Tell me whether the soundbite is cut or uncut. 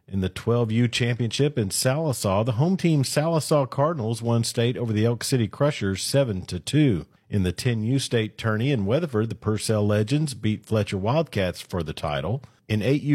uncut